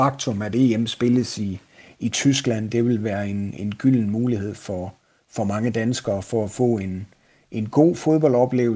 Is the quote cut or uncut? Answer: uncut